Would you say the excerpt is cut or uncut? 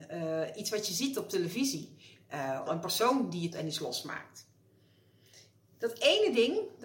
cut